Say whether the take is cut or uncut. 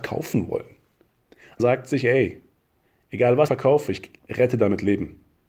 cut